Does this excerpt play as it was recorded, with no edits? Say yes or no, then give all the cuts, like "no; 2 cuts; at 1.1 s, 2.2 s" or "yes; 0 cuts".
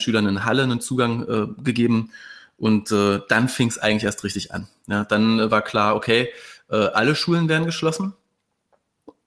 yes; 0 cuts